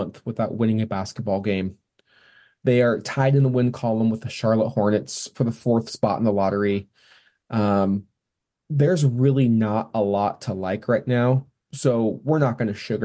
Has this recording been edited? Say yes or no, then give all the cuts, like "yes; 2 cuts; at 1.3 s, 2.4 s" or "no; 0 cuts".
no; 0 cuts